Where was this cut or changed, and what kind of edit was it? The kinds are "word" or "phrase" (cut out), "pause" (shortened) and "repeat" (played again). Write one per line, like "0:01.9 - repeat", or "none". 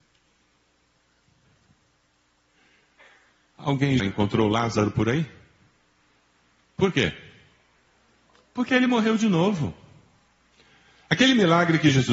0:04.0 - word